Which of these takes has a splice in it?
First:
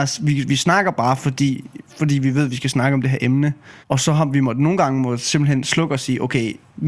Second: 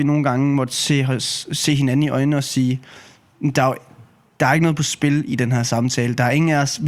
first; 2 cuts; at 1.9 s, 3.8 s

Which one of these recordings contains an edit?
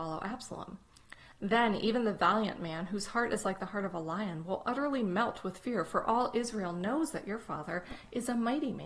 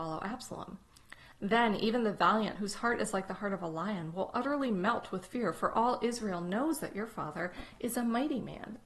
second; 1 cut; at 2.6 s

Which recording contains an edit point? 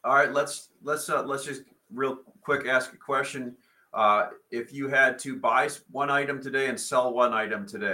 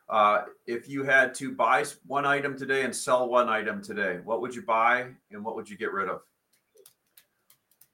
second; 1 cut; at 5.2 s

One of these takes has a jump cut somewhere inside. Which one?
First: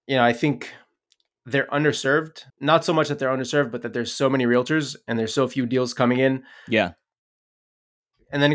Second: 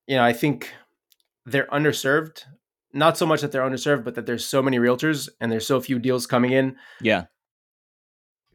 first; 1 cut; at 2.5 s

